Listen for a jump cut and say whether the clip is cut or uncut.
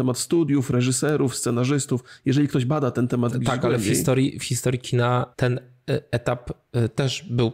cut